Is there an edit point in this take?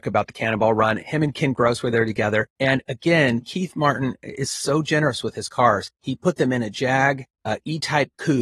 yes; 3 cuts; at 2.5 s, 5.9 s, 7.3 s

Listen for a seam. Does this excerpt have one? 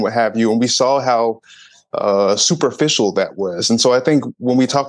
no; 0 cuts

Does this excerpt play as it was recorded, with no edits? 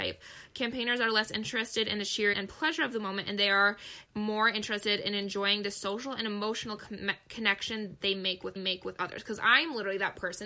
no; 3 cuts; at 2.3 s, 4.1 s, 8.6 s

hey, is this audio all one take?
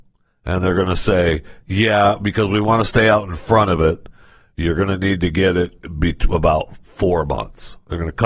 yes; 0 cuts

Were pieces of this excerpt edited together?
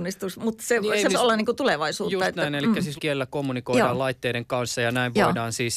yes; 2 cuts; at 1.1 s, 3.0 s

